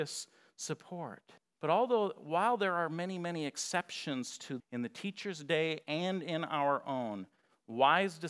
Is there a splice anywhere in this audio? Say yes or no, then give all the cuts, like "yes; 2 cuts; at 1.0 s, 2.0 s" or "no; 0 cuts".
yes; 2 cuts; at 1.4 s, 4.6 s